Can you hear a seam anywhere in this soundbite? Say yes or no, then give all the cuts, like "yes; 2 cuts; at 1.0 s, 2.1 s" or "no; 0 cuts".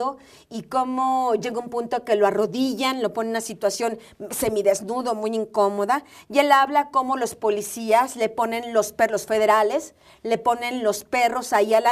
no; 0 cuts